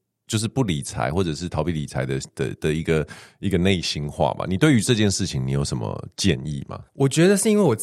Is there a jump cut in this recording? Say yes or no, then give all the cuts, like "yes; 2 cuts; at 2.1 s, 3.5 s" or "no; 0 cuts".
yes; 1 cut; at 6.9 s